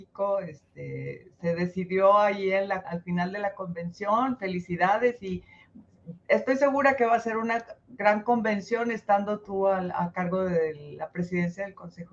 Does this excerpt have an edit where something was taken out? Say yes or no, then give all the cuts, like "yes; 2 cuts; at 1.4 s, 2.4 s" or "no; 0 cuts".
yes; 1 cut; at 2.8 s